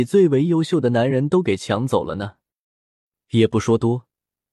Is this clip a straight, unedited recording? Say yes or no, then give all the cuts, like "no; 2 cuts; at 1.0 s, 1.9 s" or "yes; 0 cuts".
yes; 0 cuts